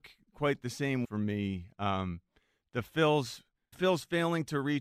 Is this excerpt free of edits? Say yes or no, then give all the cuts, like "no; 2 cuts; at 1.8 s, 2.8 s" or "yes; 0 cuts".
no; 2 cuts; at 1.0 s, 3.7 s